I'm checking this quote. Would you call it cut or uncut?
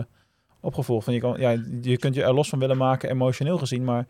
uncut